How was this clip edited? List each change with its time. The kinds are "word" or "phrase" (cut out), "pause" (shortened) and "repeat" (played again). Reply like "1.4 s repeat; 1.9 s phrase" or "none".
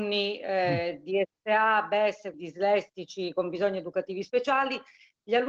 2.3 s word